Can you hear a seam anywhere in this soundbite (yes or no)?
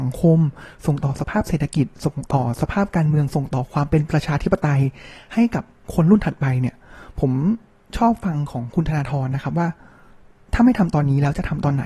no